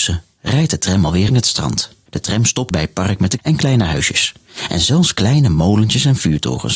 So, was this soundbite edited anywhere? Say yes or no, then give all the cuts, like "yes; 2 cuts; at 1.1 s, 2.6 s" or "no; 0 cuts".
yes; 4 cuts; at 1.3 s, 2.1 s, 2.7 s, 3.4 s